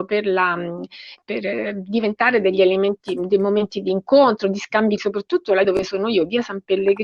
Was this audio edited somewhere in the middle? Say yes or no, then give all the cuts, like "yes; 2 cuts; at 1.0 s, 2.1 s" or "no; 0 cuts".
yes; 3 cuts; at 1.2 s, 5.0 s, 5.6 s